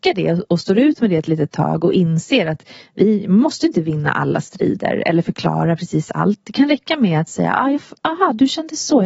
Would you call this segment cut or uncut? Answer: uncut